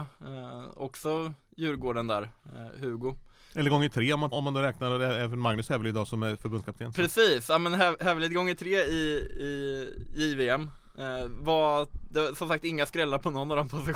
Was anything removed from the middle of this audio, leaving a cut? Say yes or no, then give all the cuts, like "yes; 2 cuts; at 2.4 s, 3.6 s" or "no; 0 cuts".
yes; 1 cut; at 4.3 s